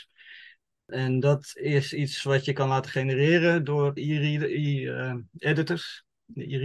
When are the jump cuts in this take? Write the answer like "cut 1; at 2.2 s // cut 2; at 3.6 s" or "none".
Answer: cut 1; at 4.0 s

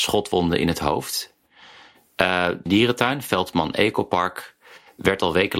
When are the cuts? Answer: cut 1; at 2.7 s

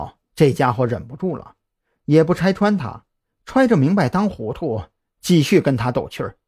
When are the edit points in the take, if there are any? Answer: none

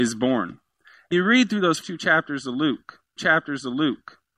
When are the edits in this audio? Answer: cut 1; at 1.1 s // cut 2; at 1.8 s // cut 3; at 3.2 s

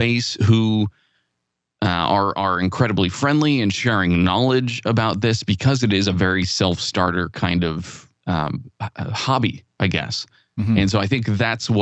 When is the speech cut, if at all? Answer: none

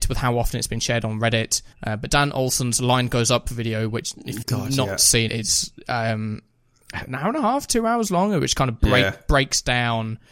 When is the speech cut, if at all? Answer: cut 1; at 1.7 s // cut 2; at 4.4 s // cut 3; at 5.3 s // cut 4; at 7.1 s

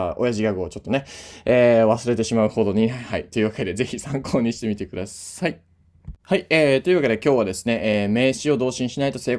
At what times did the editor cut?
cut 1; at 6.2 s

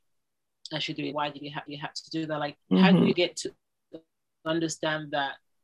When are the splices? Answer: cut 1; at 1.1 s // cut 2; at 1.7 s // cut 3; at 2.6 s // cut 4; at 3.1 s

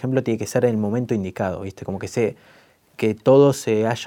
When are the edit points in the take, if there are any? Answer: none

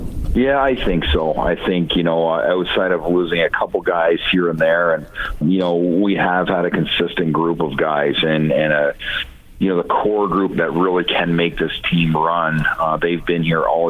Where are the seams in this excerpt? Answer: cut 1; at 5.4 s // cut 2; at 10.5 s

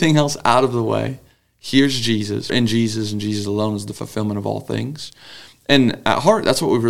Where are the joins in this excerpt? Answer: cut 1; at 2.5 s

